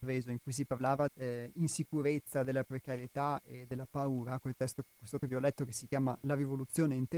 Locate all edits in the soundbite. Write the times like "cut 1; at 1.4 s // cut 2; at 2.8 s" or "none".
cut 1; at 1.1 s // cut 2; at 5.2 s

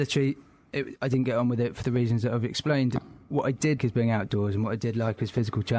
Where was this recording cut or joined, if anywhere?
cut 1; at 3.8 s

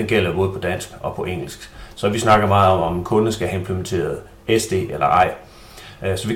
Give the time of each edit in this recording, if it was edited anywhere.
none

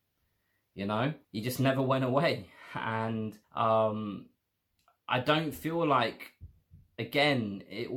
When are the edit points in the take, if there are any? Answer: cut 1; at 1.2 s // cut 2; at 3.4 s

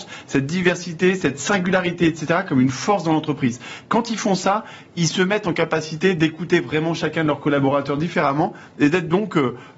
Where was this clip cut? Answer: none

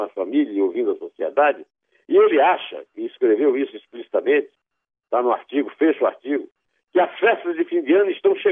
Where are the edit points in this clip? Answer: none

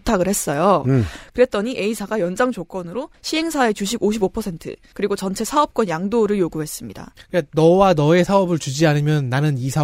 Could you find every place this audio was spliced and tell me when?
cut 1; at 7.2 s

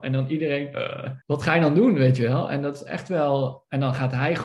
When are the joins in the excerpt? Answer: cut 1; at 1.2 s

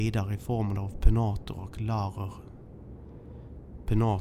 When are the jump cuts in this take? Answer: none

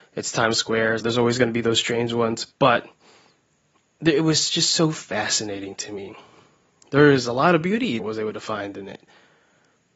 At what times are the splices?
cut 1; at 1.0 s // cut 2; at 8.0 s

